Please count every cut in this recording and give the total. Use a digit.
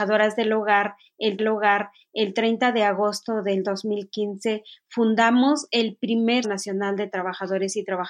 2